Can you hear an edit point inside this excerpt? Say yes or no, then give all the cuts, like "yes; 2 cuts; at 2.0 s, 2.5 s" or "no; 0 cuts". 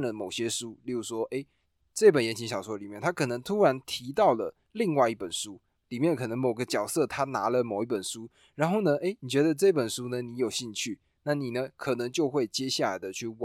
no; 0 cuts